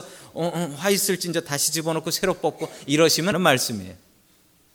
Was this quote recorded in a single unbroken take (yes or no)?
no